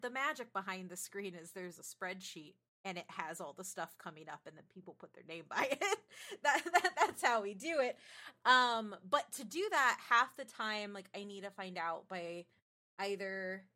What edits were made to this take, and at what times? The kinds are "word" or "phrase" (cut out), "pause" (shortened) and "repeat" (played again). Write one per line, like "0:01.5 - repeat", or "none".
none